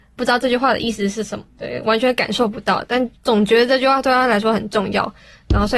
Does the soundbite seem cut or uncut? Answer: cut